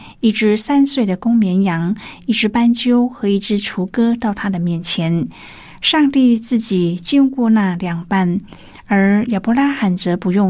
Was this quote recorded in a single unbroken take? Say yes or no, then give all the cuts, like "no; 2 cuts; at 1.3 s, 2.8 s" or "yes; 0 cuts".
yes; 0 cuts